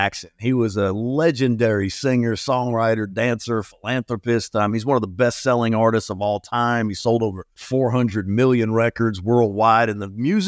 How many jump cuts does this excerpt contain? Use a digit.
1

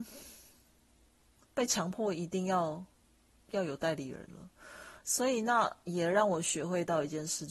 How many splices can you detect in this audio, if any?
0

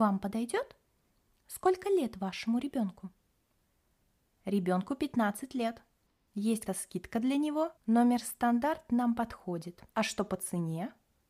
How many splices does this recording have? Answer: 3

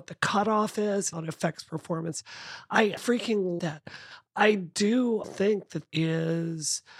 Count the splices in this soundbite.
5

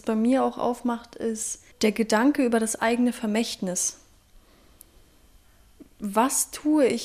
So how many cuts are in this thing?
1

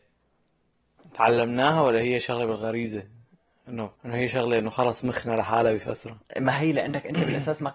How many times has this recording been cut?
1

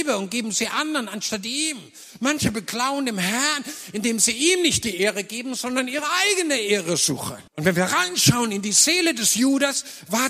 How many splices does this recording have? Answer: 1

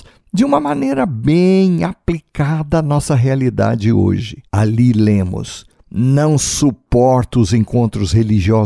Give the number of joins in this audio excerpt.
1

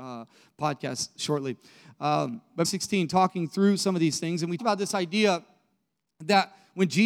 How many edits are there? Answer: 2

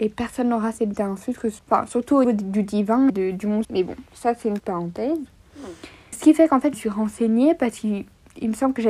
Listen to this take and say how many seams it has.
8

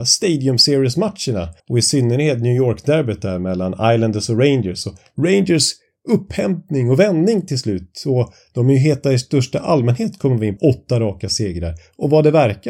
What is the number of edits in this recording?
2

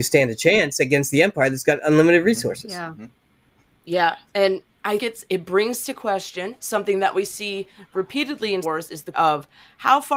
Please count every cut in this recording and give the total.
4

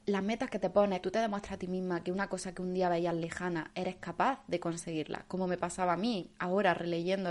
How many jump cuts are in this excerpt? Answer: 1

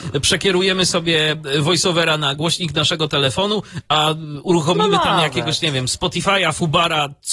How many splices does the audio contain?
0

